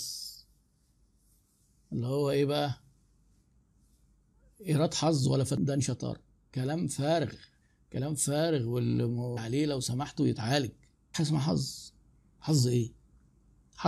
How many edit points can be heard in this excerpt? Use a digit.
3